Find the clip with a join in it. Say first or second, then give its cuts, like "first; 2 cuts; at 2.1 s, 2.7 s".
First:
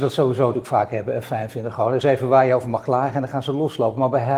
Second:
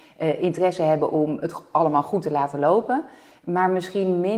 first; 1 cut; at 2.0 s